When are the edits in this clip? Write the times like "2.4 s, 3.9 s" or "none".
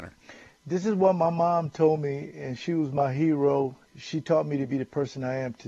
3.8 s